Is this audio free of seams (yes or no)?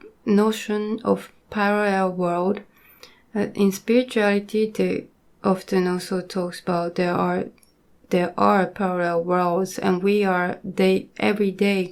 yes